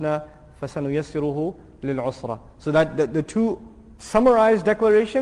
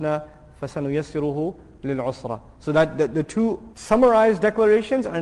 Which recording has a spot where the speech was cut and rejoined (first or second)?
second